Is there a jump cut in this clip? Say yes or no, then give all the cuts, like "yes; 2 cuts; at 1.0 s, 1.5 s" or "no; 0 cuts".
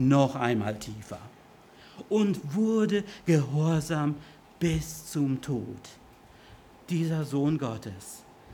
no; 0 cuts